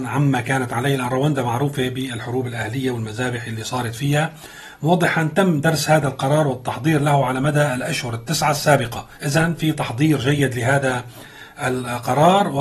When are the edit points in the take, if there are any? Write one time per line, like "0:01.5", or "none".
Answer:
0:09.1